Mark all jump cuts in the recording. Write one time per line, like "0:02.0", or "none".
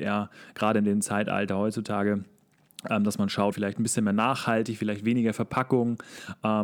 0:03.5